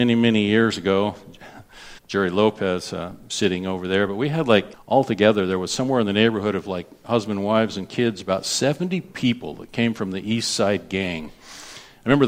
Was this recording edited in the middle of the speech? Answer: yes; 2 cuts; at 2.0 s, 4.7 s

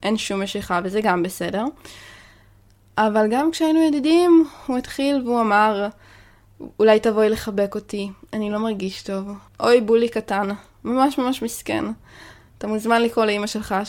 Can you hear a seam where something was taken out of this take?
yes; 1 cut; at 9.5 s

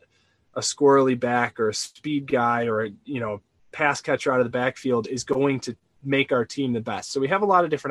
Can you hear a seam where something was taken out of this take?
no; 0 cuts

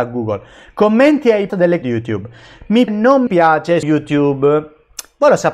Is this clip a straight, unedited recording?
no; 5 cuts; at 1.5 s, 1.8 s, 2.9 s, 3.3 s, 3.8 s

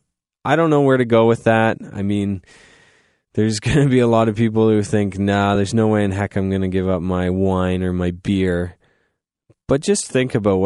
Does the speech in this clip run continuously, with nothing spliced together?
yes; 0 cuts

